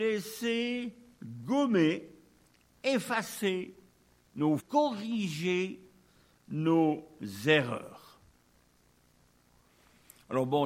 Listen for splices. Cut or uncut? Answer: cut